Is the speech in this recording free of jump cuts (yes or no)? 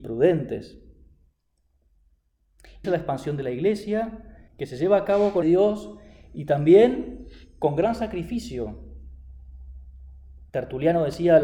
no